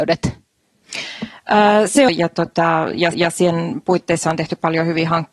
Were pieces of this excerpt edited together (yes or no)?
yes